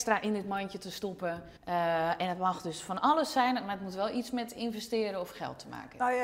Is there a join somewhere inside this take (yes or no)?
yes